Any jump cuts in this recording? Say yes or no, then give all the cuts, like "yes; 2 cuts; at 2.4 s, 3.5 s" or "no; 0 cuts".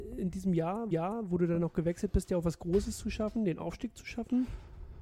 yes; 1 cut; at 0.9 s